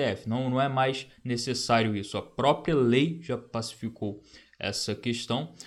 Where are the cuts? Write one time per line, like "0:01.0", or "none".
none

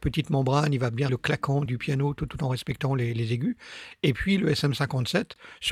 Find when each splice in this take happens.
0:01.1
0:01.7
0:02.3

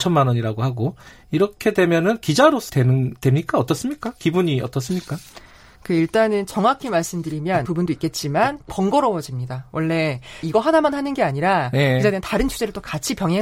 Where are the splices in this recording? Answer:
0:02.7
0:07.7
0:10.4

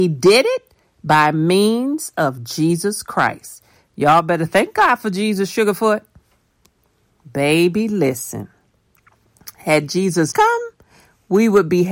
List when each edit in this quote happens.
0:10.3

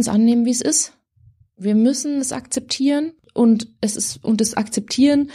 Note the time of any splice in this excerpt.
none

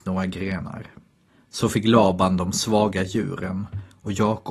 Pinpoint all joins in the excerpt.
none

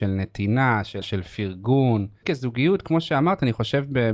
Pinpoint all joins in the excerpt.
0:01.0
0:02.2

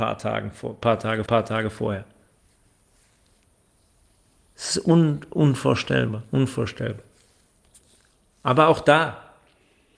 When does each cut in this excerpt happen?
0:01.3

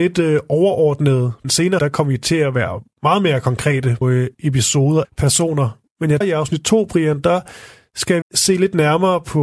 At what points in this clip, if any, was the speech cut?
0:01.4
0:01.8
0:04.0
0:04.3
0:05.0
0:06.2
0:08.2

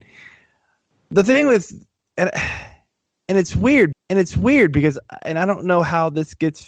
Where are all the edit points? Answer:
0:03.9

